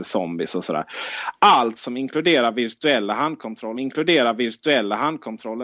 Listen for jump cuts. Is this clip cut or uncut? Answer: cut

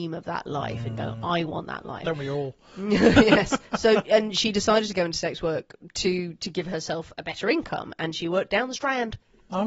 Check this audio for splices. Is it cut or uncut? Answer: uncut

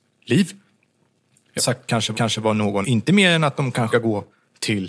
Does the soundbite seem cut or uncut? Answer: cut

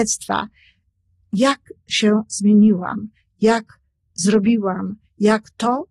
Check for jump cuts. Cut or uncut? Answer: uncut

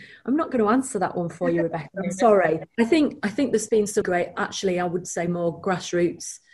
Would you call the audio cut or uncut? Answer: cut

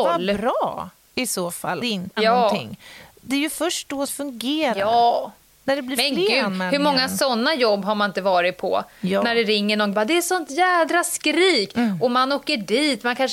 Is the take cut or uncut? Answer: cut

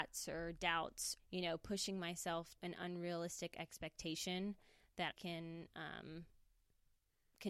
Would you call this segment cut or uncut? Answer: cut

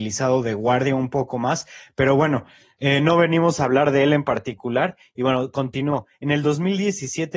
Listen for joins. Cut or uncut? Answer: uncut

